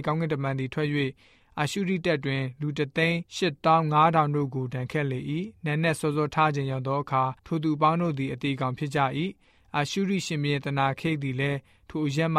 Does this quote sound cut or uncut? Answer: cut